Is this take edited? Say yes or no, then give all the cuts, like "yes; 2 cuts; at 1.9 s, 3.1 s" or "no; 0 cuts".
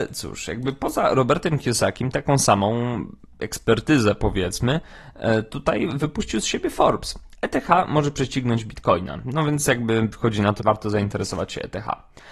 yes; 1 cut; at 10.6 s